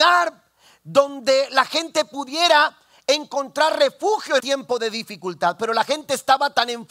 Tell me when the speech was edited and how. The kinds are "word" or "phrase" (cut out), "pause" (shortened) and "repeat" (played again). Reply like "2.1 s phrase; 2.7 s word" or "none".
4.4 s word